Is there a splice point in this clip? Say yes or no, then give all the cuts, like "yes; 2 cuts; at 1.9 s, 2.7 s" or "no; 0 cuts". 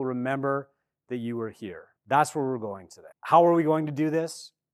yes; 2 cuts; at 2.0 s, 3.1 s